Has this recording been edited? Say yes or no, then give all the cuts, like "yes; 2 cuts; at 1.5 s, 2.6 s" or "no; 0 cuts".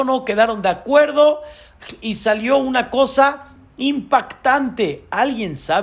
no; 0 cuts